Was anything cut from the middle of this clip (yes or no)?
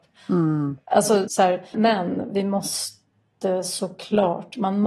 yes